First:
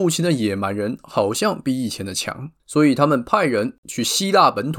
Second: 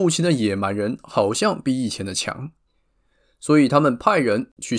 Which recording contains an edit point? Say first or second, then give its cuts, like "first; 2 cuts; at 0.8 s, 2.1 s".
first; 1 cut; at 2.6 s